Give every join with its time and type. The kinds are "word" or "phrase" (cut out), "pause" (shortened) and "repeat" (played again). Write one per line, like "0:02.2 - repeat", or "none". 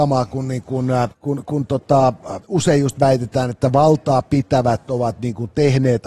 0:01.1 - pause
0:02.4 - pause